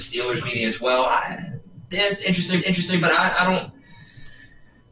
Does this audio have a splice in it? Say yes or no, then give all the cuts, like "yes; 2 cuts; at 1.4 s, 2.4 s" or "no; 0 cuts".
yes; 2 cuts; at 1.9 s, 2.6 s